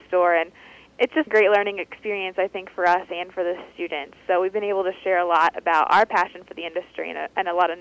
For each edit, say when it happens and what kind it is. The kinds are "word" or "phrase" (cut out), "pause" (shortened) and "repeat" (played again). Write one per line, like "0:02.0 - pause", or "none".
0:01.3 - phrase